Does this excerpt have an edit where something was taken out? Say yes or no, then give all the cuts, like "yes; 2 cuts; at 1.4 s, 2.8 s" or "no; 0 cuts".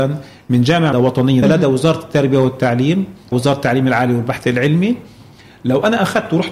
yes; 3 cuts; at 0.9 s, 1.4 s, 3.3 s